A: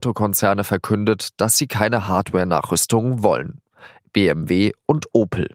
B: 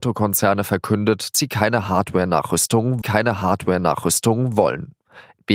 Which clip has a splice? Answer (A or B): B